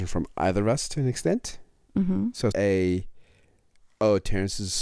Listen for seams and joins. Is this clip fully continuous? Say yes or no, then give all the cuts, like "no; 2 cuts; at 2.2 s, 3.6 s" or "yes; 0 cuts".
no; 1 cut; at 2.5 s